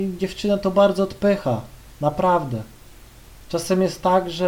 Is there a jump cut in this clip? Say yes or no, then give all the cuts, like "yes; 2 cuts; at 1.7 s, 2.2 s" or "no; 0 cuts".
no; 0 cuts